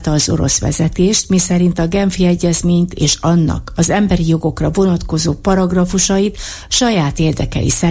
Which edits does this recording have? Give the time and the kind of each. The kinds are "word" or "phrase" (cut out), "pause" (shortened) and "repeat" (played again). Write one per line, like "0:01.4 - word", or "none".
none